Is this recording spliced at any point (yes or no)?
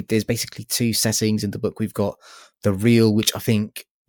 no